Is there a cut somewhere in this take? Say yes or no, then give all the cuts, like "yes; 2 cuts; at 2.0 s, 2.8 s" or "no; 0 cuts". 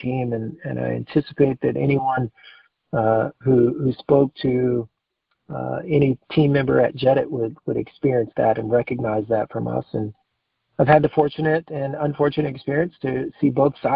no; 0 cuts